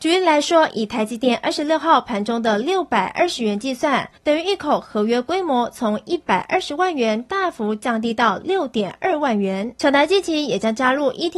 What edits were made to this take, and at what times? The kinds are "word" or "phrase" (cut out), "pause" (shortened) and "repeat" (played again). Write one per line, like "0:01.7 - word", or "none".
0:04.2 - pause